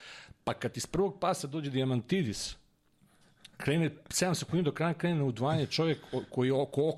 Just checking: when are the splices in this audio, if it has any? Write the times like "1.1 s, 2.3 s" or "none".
3.5 s